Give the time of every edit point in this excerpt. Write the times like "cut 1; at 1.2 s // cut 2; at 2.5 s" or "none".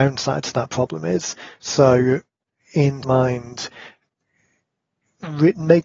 cut 1; at 3.0 s